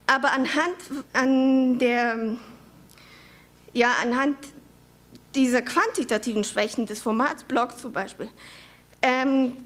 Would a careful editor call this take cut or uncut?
cut